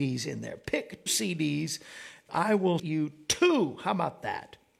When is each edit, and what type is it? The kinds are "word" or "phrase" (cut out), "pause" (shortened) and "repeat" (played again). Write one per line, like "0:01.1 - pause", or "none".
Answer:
0:01.1 - word
0:02.3 - phrase
0:02.8 - word